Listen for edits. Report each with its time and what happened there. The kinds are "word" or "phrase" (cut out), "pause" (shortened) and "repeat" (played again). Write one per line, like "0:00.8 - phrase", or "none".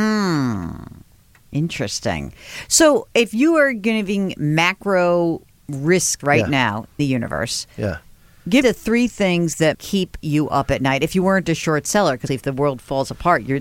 0:06.2 - word
0:07.0 - word
0:08.6 - word
0:09.7 - word
0:12.3 - word